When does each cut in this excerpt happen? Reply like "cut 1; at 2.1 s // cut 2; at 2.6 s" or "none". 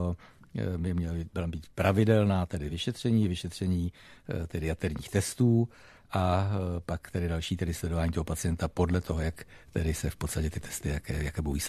none

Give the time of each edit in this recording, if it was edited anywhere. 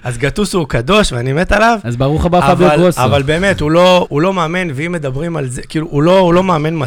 cut 1; at 4.1 s

